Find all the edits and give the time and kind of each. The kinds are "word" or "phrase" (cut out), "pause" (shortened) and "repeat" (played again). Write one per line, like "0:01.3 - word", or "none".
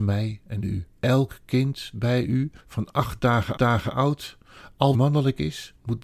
0:01.0 - pause
0:02.6 - pause
0:03.6 - repeat
0:04.9 - word